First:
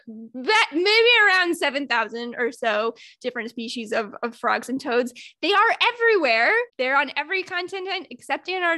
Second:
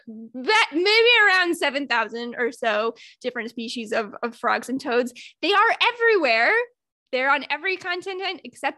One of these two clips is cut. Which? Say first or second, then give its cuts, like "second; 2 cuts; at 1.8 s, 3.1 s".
first; 1 cut; at 6.7 s